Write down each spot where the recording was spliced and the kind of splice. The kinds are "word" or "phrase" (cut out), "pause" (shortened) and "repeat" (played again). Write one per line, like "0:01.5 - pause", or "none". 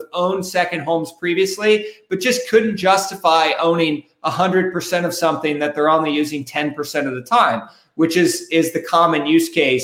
none